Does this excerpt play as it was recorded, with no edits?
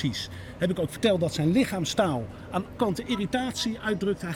no; 1 cut; at 2.8 s

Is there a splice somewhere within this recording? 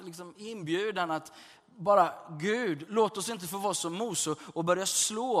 no; 0 cuts

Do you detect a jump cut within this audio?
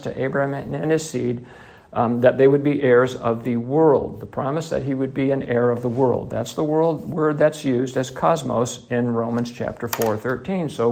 no; 0 cuts

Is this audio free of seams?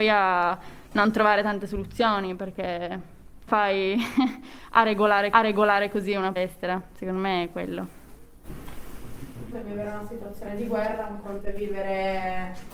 no; 4 cuts; at 3.5 s, 5.3 s, 6.4 s, 9.5 s

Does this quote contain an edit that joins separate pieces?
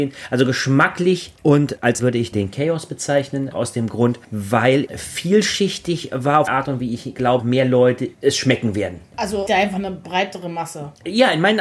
yes; 9 cuts; at 1.3 s, 2.0 s, 2.3 s, 3.5 s, 4.9 s, 6.5 s, 6.8 s, 7.4 s, 9.5 s

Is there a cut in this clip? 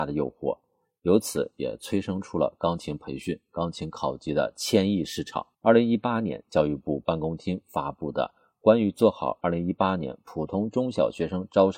yes; 1 cut; at 5.5 s

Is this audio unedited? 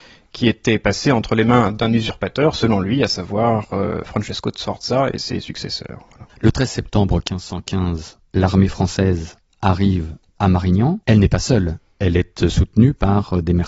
no; 3 cuts; at 6.3 s, 8.3 s, 11.0 s

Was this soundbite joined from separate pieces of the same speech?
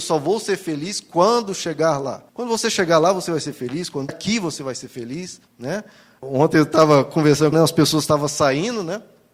yes; 4 cuts; at 2.3 s, 4.1 s, 5.5 s, 7.5 s

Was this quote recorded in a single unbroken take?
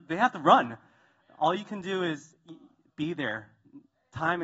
yes; 0 cuts

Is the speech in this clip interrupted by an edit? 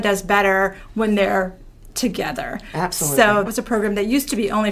yes; 1 cut; at 3.5 s

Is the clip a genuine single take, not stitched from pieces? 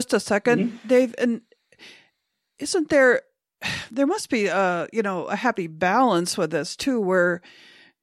yes; 0 cuts

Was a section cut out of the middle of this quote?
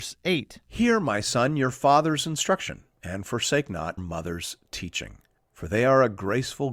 yes; 2 cuts; at 4.0 s, 5.4 s

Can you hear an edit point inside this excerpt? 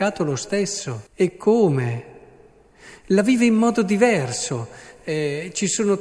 yes; 1 cut; at 1.1 s

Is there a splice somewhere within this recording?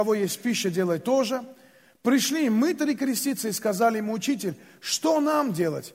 no; 0 cuts

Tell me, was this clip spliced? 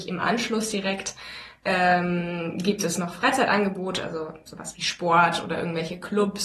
no; 0 cuts

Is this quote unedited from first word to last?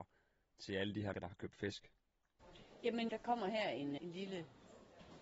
no; 3 cuts; at 1.1 s, 3.1 s, 4.0 s

